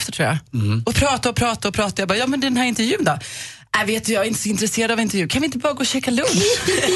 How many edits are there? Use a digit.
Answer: 0